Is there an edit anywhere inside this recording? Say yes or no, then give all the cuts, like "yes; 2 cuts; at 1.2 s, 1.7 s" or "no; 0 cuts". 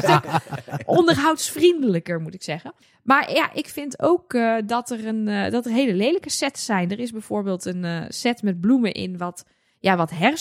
yes; 1 cut; at 2.8 s